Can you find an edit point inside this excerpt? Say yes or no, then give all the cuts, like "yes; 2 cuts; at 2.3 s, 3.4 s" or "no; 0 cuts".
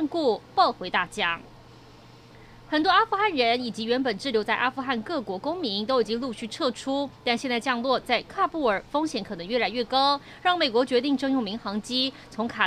no; 0 cuts